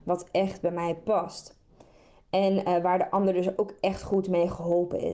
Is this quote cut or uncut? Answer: uncut